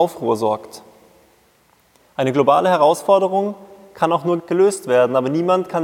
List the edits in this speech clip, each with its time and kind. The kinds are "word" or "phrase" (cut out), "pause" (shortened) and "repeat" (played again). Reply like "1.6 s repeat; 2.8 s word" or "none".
4.4 s word